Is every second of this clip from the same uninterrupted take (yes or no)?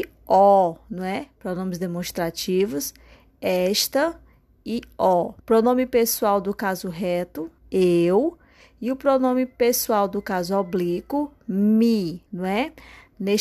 no